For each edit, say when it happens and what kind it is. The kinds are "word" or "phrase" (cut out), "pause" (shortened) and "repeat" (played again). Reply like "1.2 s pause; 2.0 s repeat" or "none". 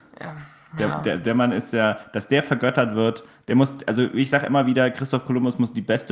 none